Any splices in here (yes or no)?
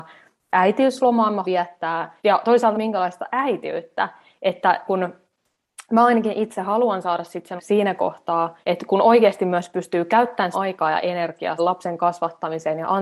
yes